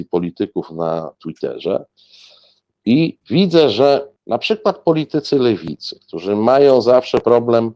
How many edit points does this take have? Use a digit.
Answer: 2